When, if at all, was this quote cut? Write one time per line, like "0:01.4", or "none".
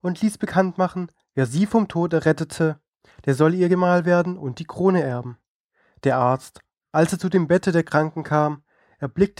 none